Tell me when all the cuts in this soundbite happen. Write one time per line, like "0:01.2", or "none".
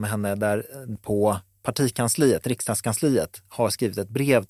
0:01.0